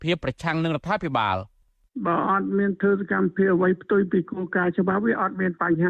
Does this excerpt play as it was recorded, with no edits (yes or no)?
yes